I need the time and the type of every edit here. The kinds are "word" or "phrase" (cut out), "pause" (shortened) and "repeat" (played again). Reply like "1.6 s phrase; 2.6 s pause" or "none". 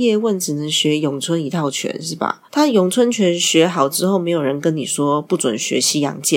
2.5 s pause